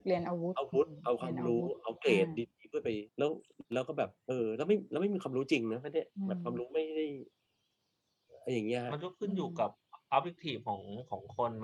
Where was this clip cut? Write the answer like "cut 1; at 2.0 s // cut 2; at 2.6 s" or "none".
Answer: cut 1; at 3.1 s // cut 2; at 3.7 s // cut 3; at 4.2 s